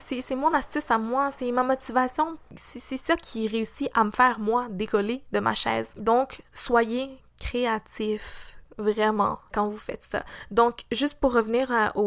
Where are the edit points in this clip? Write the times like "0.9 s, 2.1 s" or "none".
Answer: 9.5 s